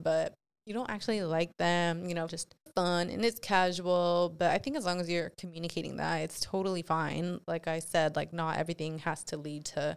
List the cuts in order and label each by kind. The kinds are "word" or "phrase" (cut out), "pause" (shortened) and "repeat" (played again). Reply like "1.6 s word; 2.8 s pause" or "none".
2.3 s phrase; 2.7 s phrase